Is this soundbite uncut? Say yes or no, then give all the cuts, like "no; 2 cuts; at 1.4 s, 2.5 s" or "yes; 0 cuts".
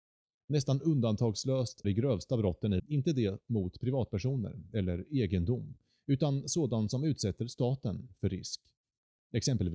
no; 2 cuts; at 1.8 s, 2.8 s